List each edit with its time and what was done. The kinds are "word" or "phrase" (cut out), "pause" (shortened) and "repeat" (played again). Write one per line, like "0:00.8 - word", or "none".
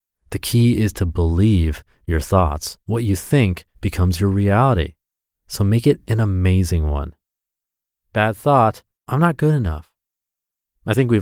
0:02.8 - pause
0:03.7 - pause
0:09.0 - pause